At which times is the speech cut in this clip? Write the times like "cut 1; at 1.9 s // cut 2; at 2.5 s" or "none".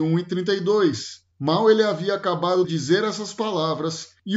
cut 1; at 2.6 s

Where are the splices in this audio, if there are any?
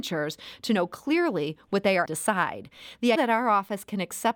cut 1; at 2.0 s // cut 2; at 3.1 s

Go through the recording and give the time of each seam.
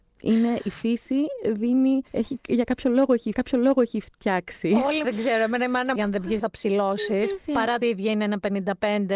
cut 1; at 2.1 s // cut 2; at 3.3 s // cut 3; at 5.0 s // cut 4; at 6.0 s // cut 5; at 6.4 s // cut 6; at 7.8 s

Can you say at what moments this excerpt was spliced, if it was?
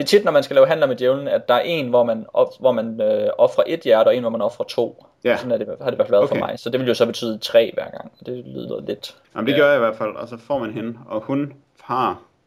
cut 1; at 5.2 s // cut 2; at 9.2 s

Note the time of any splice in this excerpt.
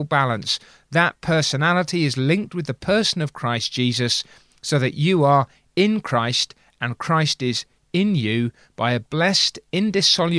none

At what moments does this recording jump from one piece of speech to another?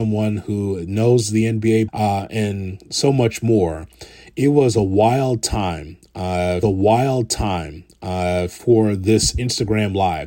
cut 1; at 1.9 s // cut 2; at 6.6 s

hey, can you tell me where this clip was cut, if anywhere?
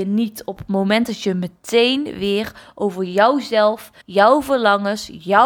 cut 1; at 4.0 s

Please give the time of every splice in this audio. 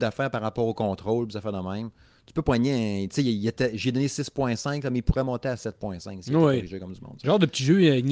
none

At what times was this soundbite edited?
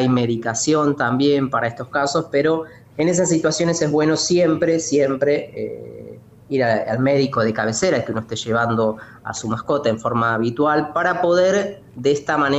none

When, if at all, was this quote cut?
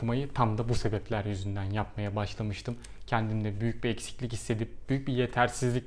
none

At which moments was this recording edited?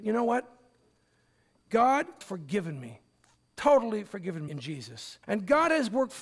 cut 1; at 2.2 s // cut 2; at 4.5 s // cut 3; at 5.2 s

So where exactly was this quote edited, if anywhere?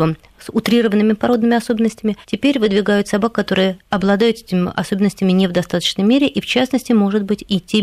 cut 1; at 2.2 s // cut 2; at 3.8 s

